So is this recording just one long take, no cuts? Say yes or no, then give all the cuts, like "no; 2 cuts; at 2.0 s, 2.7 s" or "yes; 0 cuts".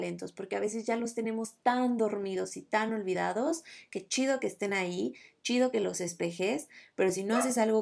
yes; 0 cuts